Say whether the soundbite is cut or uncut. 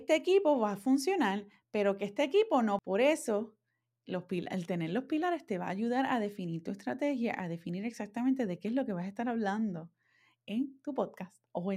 uncut